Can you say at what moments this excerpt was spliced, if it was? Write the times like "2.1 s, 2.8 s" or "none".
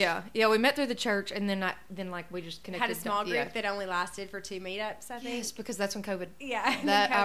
none

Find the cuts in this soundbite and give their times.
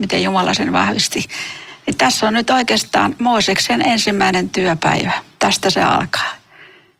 none

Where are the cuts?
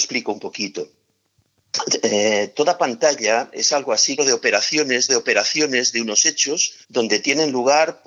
4.2 s, 5.1 s, 6.8 s

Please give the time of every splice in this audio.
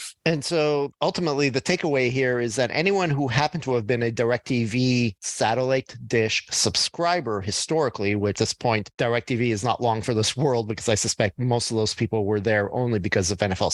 8.4 s

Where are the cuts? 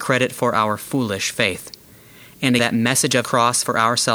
2.6 s, 3.2 s

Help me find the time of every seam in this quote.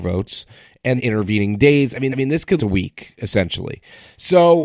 1.0 s, 2.1 s, 2.6 s

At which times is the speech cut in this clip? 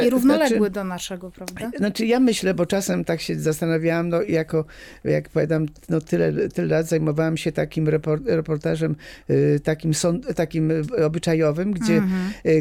none

